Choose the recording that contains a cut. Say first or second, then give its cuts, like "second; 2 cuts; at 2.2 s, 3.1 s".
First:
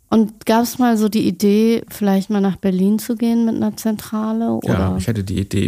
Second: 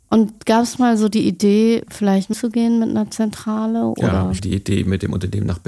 second; 2 cuts; at 2.3 s, 4.4 s